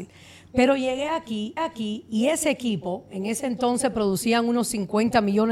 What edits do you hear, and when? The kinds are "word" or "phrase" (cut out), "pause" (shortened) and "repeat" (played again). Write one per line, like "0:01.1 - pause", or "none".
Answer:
0:01.6 - repeat

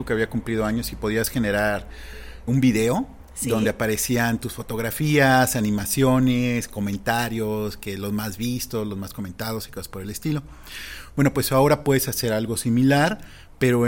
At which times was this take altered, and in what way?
0:02.5 - word

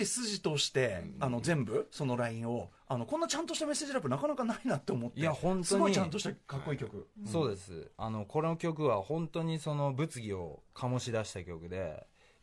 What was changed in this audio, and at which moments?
0:02.8 - pause

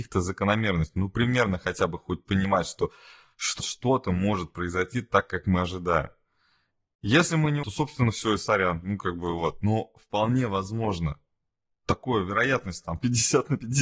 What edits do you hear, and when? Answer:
0:03.6 - word
0:07.6 - phrase

